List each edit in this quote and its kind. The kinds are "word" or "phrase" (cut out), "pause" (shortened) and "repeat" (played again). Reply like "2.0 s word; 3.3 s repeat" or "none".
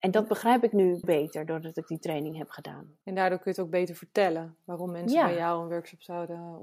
1.0 s word; 3.0 s pause